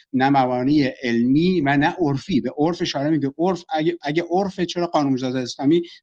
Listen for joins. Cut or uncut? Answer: uncut